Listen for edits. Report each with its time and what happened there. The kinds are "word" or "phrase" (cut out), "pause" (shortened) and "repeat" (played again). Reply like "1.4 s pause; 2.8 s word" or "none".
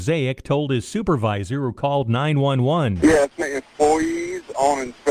3.4 s phrase